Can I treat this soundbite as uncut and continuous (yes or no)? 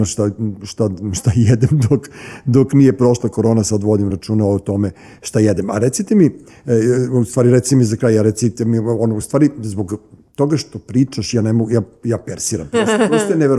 yes